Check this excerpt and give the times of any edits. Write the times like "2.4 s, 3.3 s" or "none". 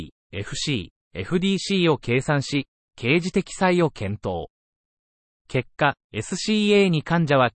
6.0 s